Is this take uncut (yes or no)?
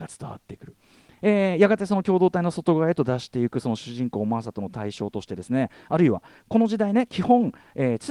yes